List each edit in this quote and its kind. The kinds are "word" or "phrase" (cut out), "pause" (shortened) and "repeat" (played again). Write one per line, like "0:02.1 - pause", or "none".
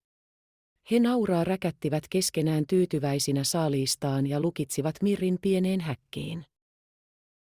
none